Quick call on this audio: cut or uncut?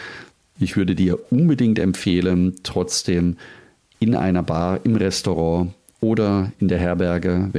uncut